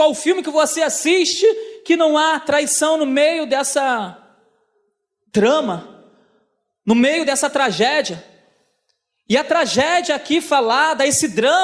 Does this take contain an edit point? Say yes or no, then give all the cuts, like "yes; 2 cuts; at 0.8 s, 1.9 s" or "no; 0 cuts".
no; 0 cuts